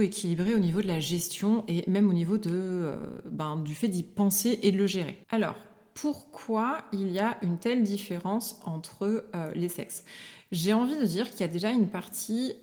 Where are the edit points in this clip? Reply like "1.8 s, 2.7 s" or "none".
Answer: 5.2 s